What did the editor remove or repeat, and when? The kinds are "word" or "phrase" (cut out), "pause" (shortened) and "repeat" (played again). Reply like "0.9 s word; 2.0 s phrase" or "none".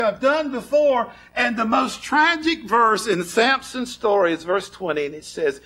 none